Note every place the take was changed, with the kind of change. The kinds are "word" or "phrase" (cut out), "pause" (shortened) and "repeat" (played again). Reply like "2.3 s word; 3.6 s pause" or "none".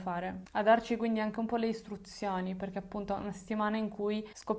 none